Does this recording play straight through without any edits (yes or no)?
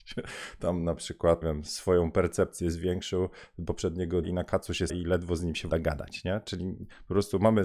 no